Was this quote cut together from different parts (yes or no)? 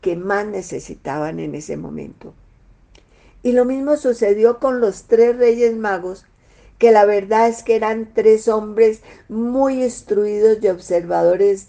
no